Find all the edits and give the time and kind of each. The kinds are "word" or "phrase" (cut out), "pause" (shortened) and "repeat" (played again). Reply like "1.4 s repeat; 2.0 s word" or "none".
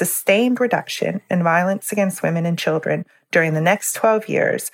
none